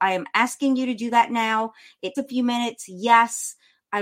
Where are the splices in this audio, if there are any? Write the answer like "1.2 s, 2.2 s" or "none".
2.1 s